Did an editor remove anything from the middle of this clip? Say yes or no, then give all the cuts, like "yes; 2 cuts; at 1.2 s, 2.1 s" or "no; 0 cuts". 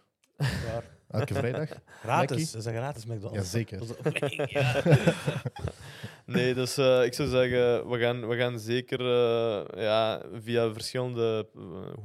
no; 0 cuts